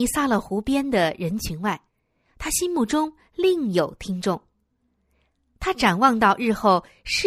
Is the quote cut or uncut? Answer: uncut